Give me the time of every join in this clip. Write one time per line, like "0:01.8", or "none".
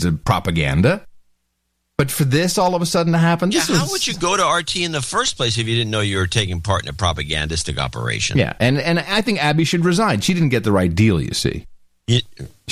none